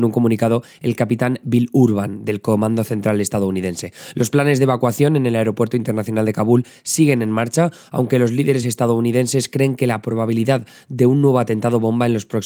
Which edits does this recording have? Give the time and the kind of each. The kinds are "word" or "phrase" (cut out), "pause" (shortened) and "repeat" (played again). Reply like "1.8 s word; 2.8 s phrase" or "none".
8.6 s word

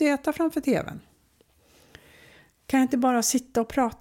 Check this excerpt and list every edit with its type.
none

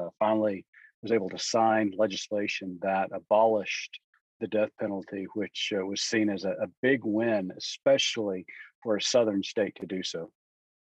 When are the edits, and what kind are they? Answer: none

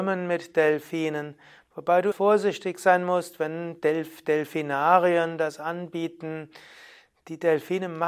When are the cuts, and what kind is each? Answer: 2.1 s word

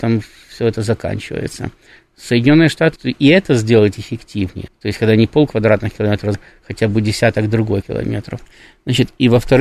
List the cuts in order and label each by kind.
3.0 s word; 4.7 s word; 6.3 s word; 7.8 s word

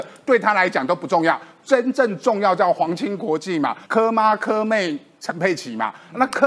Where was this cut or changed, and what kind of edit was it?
3.8 s pause

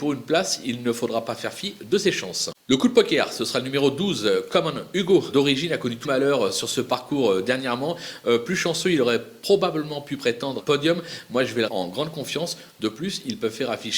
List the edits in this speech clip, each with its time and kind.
5.3 s phrase; 6.0 s word; 10.6 s phrase; 11.7 s word

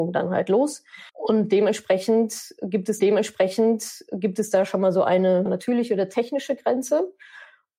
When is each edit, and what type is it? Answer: 1.1 s pause; 3.0 s repeat; 5.5 s word

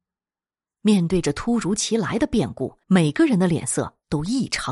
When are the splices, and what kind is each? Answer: 2.8 s pause

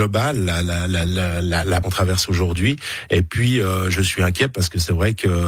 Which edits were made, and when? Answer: 1.8 s phrase

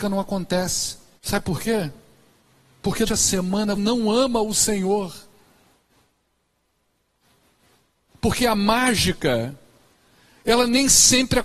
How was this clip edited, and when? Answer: 1.2 s pause; 3.1 s word; 3.7 s word

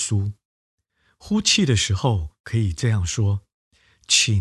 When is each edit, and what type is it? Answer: 2.4 s pause

